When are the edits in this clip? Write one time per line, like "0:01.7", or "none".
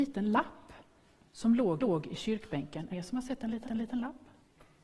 0:01.8
0:02.9
0:03.6